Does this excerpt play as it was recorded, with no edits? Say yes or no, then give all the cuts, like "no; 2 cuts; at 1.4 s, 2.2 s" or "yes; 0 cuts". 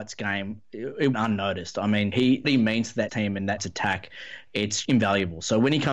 no; 6 cuts; at 1.1 s, 2.1 s, 2.4 s, 3.1 s, 3.6 s, 4.8 s